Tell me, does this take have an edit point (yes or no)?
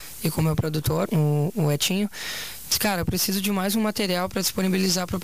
yes